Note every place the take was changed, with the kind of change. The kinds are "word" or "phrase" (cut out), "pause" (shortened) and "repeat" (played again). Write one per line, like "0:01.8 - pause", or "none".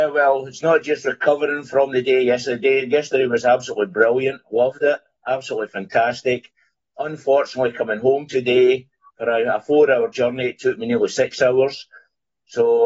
none